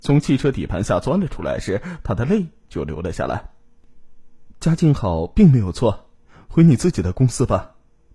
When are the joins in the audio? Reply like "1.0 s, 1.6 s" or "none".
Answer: none